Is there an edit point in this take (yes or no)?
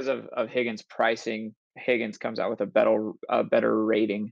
yes